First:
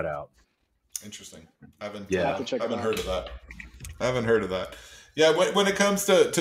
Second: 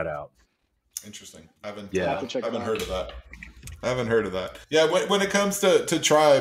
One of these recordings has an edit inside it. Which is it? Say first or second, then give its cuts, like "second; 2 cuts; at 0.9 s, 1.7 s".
second; 2 cuts; at 1.6 s, 4.6 s